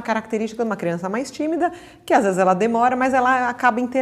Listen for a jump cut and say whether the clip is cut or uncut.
uncut